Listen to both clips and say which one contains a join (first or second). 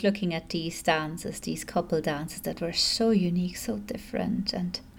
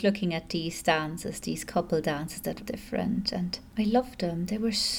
second